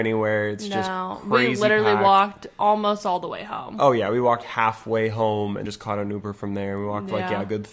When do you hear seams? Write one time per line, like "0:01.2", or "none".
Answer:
0:04.4
0:05.7